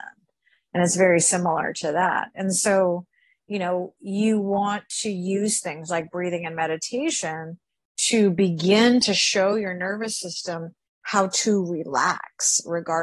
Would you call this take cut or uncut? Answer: uncut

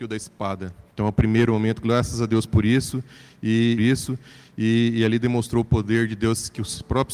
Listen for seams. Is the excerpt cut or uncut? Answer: cut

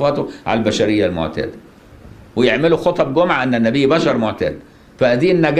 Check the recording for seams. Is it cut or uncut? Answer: uncut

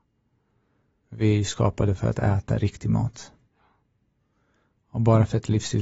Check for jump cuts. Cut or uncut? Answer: uncut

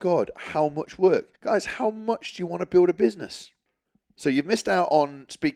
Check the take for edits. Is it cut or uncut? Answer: cut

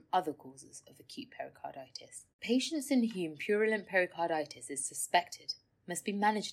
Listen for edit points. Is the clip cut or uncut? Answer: cut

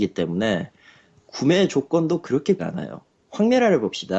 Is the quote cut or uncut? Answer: cut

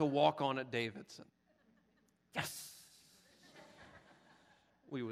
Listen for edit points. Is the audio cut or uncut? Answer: cut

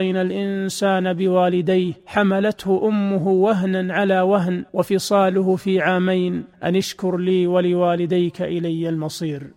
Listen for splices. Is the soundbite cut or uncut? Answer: cut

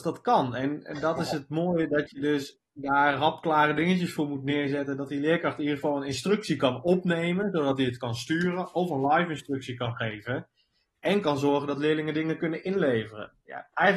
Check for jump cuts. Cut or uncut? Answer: uncut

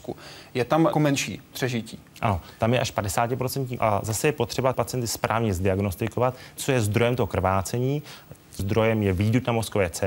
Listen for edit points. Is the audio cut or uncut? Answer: cut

